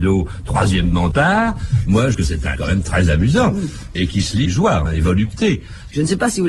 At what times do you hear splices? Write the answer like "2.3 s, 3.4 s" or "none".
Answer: 1.1 s, 2.1 s, 2.5 s, 3.9 s, 4.4 s, 4.8 s